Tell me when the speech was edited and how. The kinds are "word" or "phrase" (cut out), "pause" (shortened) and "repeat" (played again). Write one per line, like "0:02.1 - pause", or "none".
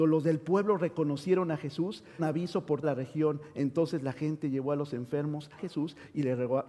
0:02.2 - word
0:02.8 - word
0:05.6 - phrase